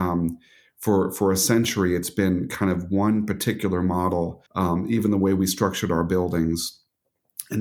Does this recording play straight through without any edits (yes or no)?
no